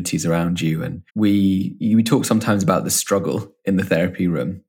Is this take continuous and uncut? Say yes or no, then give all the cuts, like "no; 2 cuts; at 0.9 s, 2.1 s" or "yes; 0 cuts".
no; 1 cut; at 1.1 s